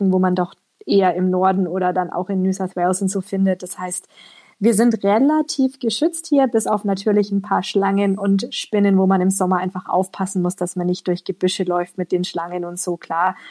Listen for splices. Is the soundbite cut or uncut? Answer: uncut